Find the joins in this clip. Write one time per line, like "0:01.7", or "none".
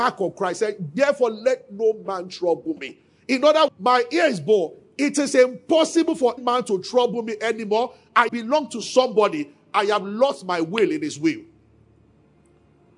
0:03.7
0:06.4
0:08.3